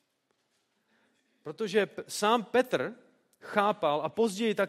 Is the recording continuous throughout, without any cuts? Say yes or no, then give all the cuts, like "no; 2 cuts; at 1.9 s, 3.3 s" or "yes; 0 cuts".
yes; 0 cuts